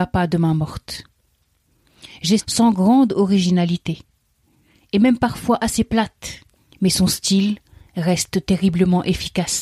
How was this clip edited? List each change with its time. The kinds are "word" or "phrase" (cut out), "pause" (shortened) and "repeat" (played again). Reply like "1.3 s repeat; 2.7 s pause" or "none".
2.4 s phrase; 6.7 s pause